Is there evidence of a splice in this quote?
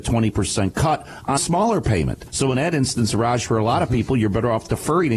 yes; 1 cut; at 1.4 s

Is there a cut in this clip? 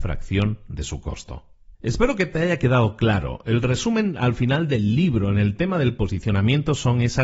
yes; 1 cut; at 1.7 s

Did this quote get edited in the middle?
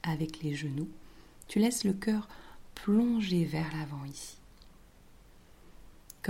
no; 0 cuts

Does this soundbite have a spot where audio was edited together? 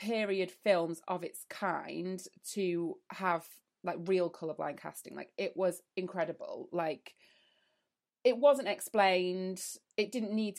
no; 0 cuts

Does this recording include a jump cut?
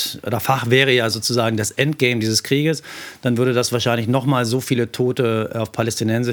no; 0 cuts

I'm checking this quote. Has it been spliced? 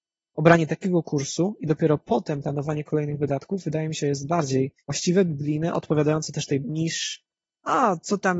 yes; 2 cuts; at 4.8 s, 6.6 s

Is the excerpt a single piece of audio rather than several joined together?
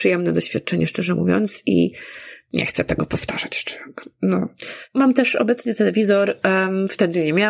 yes; 0 cuts

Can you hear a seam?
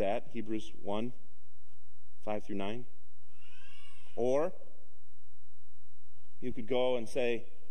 no; 0 cuts

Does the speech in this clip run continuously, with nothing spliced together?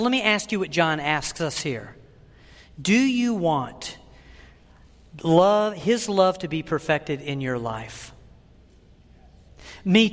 yes; 0 cuts

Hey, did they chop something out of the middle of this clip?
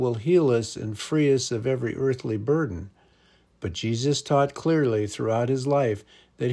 no; 0 cuts

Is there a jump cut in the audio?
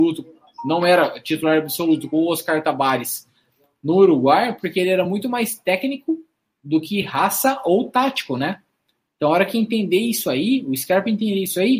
no; 0 cuts

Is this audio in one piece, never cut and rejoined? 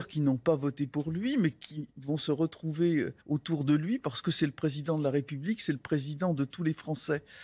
no; 1 cut; at 3.2 s

